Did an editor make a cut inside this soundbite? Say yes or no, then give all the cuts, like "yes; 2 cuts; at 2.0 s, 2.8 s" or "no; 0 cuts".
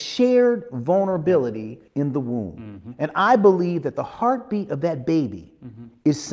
yes; 1 cut; at 1.9 s